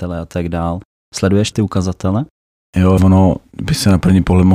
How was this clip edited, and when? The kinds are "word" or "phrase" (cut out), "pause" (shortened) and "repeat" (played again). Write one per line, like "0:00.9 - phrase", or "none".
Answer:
0:01.5 - word
0:03.0 - word